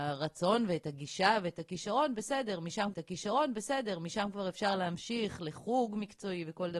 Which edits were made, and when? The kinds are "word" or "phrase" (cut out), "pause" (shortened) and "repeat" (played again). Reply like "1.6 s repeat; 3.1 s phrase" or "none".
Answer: 2.9 s repeat

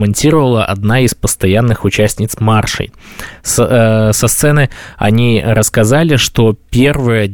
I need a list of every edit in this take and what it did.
none

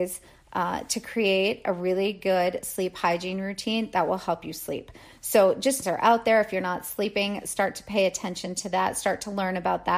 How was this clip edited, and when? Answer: 5.8 s phrase

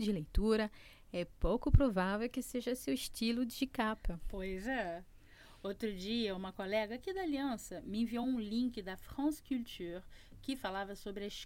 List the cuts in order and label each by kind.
none

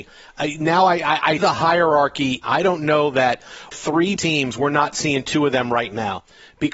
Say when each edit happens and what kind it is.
1.4 s word; 2.4 s phrase; 3.7 s word; 4.2 s word

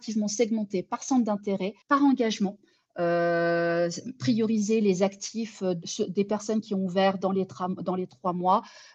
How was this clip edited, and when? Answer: 1.8 s pause; 5.8 s word

